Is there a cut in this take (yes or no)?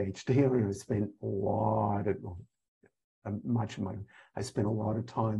yes